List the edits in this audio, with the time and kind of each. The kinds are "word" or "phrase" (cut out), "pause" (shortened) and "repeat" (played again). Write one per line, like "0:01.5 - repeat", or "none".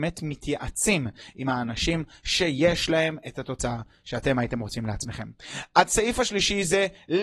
none